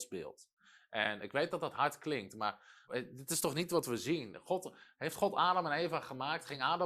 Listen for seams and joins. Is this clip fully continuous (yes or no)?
no